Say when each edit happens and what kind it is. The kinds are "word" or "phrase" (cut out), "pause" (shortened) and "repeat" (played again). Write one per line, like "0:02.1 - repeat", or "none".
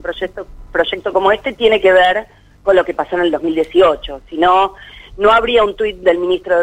none